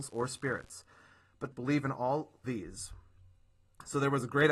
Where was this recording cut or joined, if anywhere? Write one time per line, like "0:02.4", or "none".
0:01.5
0:02.4